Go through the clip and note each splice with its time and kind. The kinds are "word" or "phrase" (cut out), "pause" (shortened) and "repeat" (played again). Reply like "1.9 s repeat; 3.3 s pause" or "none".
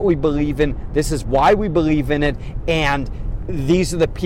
none